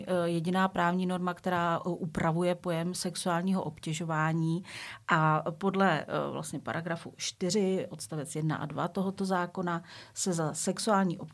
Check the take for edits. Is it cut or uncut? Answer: uncut